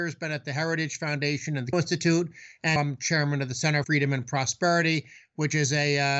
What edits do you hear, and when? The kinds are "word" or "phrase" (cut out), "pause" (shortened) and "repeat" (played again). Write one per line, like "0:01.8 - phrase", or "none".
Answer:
0:01.7 - word
0:02.8 - word
0:03.8 - word